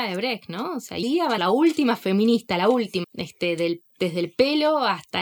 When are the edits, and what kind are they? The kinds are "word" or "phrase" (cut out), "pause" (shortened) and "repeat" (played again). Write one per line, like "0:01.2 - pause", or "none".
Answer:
0:01.0 - word
0:01.4 - phrase
0:03.0 - phrase